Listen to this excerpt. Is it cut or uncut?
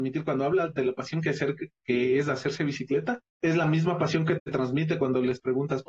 cut